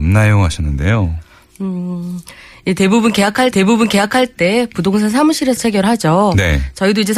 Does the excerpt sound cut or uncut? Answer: cut